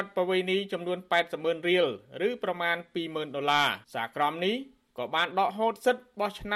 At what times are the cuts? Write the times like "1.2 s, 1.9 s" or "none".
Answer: 3.8 s

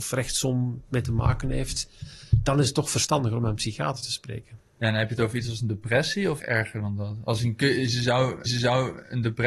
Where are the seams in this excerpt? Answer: 6.4 s, 8.5 s

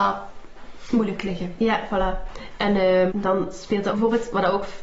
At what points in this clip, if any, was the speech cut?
3.1 s, 3.9 s

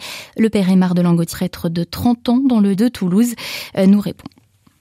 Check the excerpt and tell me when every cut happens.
1.3 s, 2.7 s

